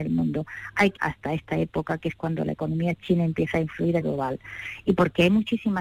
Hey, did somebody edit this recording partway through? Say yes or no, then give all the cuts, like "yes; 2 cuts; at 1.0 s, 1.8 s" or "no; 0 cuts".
yes; 2 cuts; at 1.0 s, 4.0 s